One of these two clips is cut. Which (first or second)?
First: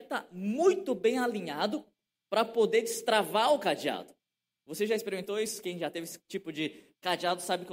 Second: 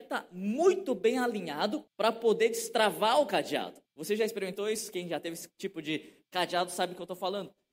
second